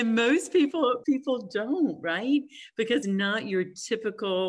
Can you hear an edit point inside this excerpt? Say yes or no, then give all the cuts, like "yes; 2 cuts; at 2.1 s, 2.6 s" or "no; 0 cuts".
yes; 2 cuts; at 1.0 s, 3.0 s